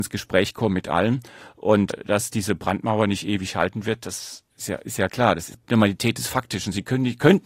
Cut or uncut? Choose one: uncut